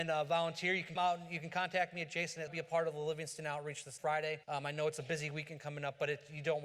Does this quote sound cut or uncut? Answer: cut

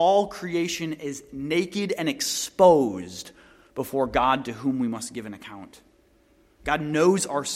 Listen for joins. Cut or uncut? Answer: uncut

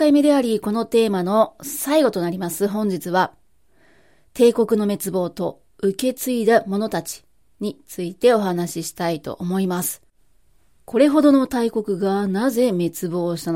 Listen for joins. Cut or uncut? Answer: uncut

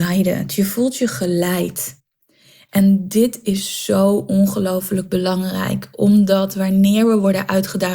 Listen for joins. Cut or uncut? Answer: uncut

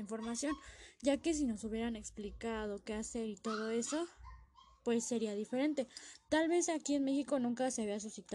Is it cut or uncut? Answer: uncut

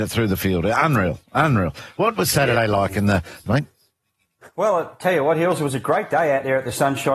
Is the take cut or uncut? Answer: cut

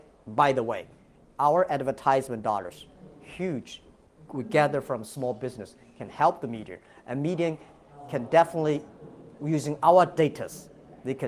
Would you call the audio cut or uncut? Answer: uncut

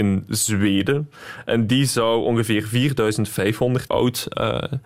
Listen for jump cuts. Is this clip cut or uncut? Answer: cut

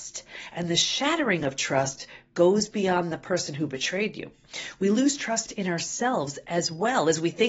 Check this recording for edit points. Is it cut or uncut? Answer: uncut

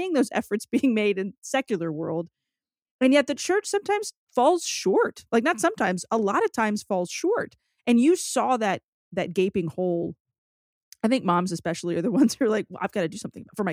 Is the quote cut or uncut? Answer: uncut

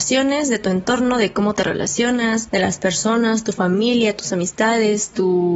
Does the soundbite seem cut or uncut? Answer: uncut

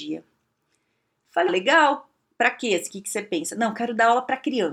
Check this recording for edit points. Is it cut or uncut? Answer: cut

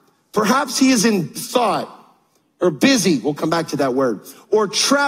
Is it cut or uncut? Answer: cut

